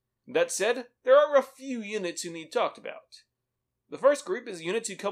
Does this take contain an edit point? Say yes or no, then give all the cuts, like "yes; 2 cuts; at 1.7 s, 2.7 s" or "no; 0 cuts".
no; 0 cuts